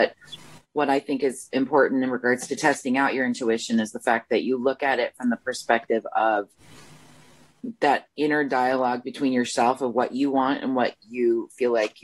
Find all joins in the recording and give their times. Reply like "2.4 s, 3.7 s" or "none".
none